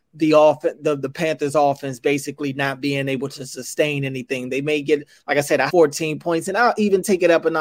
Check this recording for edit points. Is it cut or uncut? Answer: cut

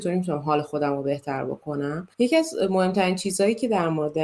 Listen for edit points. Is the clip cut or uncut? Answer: cut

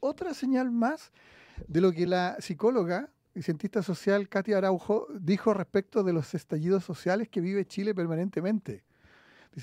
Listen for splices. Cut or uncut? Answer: uncut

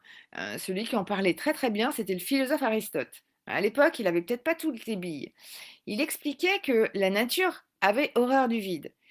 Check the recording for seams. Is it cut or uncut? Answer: uncut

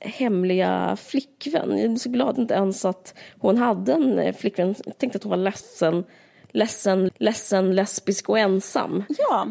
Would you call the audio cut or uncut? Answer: cut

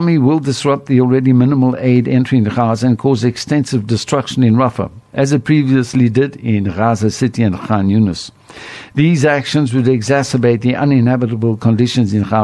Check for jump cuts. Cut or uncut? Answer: uncut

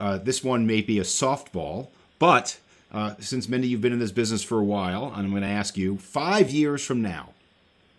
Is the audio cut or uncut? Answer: uncut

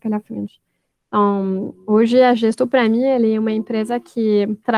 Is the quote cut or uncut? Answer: uncut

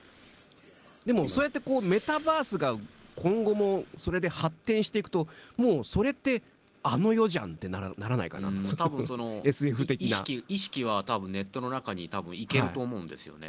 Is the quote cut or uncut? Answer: uncut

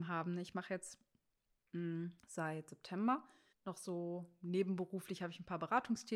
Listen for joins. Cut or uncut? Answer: cut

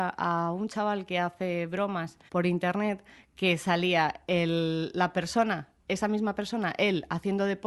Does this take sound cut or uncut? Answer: cut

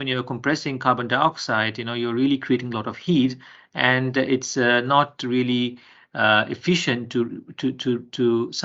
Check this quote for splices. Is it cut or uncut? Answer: uncut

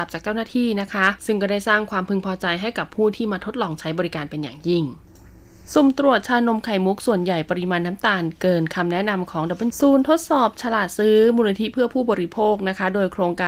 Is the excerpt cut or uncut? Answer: cut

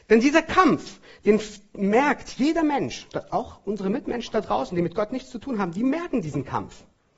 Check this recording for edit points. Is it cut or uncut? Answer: uncut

